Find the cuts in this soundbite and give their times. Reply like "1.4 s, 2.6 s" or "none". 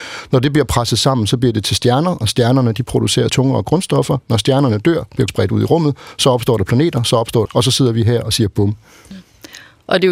3.3 s, 5.3 s, 7.5 s